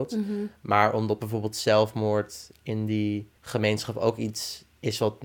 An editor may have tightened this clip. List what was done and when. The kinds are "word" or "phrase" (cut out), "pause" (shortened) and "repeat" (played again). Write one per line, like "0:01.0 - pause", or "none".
0:03.4 - pause